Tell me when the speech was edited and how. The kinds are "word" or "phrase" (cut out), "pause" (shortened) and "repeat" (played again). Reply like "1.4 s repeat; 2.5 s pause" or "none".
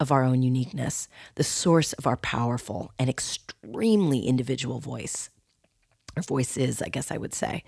none